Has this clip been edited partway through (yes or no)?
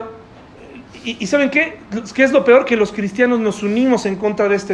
no